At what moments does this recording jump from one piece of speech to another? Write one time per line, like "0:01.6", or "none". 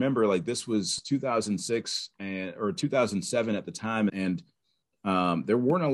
0:04.1